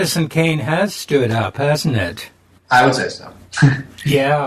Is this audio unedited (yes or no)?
yes